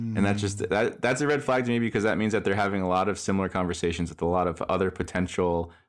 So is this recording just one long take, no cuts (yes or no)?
yes